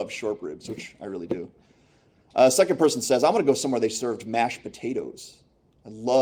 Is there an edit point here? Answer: no; 0 cuts

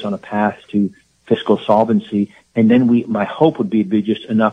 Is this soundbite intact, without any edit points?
yes; 0 cuts

